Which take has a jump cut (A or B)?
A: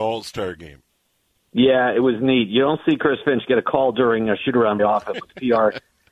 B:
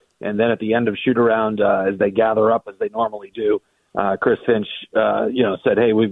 A